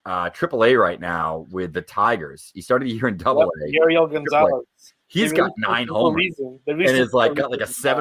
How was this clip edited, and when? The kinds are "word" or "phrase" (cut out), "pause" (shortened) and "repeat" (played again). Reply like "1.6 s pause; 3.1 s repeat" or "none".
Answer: none